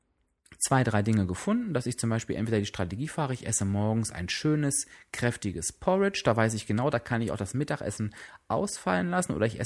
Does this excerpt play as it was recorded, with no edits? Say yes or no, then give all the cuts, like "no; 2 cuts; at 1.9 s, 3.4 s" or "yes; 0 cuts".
yes; 0 cuts